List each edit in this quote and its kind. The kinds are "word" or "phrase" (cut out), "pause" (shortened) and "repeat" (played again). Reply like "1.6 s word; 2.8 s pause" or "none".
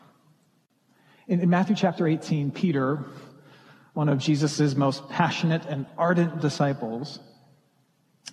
none